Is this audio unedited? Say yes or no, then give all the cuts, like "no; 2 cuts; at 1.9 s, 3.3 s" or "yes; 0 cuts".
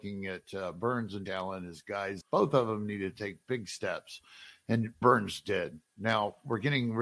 no; 3 cuts; at 1.3 s, 2.2 s, 5.0 s